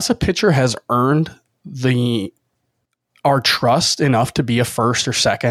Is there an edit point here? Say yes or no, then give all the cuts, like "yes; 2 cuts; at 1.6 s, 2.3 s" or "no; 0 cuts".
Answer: no; 0 cuts